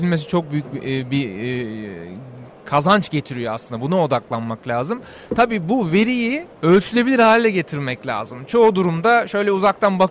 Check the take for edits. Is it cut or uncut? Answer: cut